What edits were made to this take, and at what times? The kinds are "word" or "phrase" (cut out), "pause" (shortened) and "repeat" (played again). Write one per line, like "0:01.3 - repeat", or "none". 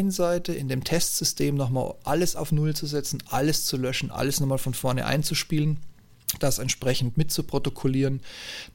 none